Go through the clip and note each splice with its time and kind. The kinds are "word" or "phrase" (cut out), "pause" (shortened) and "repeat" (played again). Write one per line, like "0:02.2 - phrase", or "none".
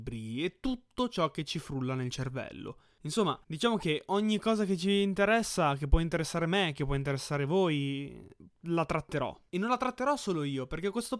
0:03.4 - pause

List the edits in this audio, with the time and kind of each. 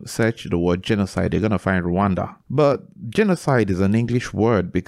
0:02.4 - pause

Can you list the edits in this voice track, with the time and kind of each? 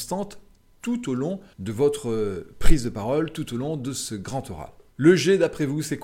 0:01.5 - pause

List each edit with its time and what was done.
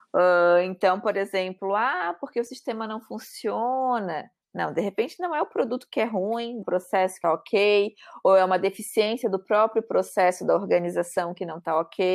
0:06.6 - phrase
0:07.2 - phrase

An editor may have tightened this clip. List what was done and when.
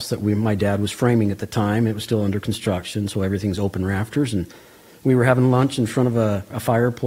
none

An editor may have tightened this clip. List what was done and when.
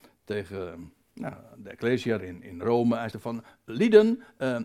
0:01.0 - pause
0:02.2 - word
0:03.1 - word

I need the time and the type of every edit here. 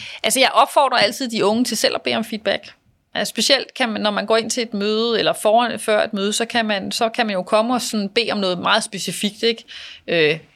none

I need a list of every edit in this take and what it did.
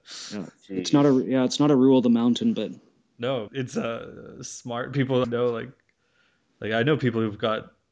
0:03.5 - word
0:05.2 - word

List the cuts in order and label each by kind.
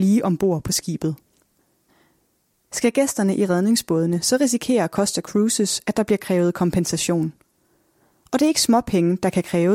none

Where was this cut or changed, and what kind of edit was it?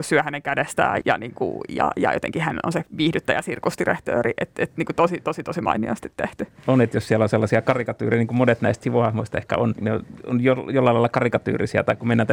0:01.0 - word
0:09.7 - word

